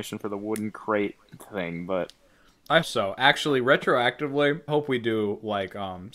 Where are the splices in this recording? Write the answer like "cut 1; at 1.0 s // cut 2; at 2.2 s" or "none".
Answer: cut 1; at 2.8 s // cut 2; at 4.7 s